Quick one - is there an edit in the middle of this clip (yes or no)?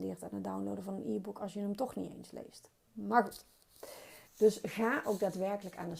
yes